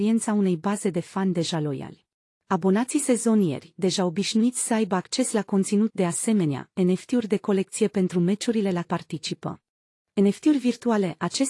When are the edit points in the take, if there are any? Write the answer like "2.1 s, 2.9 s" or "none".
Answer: 2.2 s, 5.9 s, 8.8 s, 9.8 s